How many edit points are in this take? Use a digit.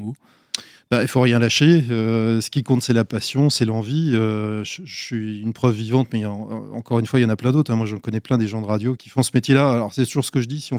1